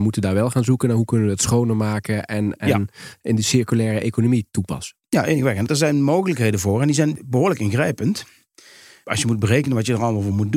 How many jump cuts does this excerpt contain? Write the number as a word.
zero